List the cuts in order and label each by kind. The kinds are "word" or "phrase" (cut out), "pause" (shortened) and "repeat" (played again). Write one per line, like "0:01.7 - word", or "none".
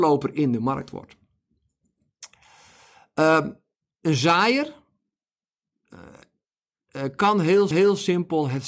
0:03.9 - pause
0:07.7 - repeat

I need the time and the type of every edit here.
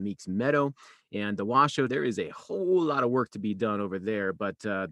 0:01.9 - word

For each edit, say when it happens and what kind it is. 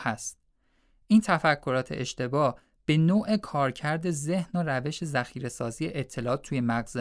none

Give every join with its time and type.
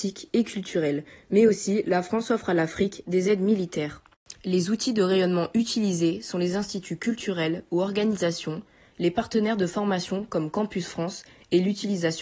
none

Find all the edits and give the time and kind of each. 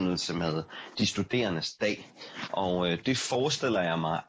none

